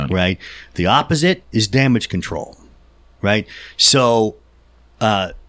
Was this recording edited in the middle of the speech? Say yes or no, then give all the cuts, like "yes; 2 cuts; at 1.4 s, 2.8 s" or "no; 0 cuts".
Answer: no; 0 cuts